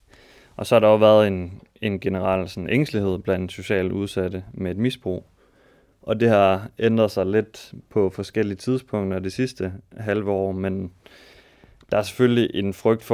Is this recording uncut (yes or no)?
yes